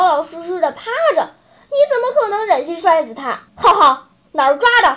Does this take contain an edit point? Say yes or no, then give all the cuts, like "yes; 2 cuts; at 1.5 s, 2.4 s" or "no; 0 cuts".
yes; 1 cut; at 3.5 s